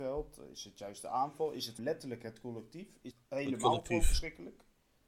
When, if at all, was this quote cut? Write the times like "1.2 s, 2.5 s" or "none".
1.8 s, 3.1 s